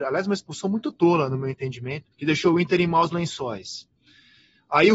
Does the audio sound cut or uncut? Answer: cut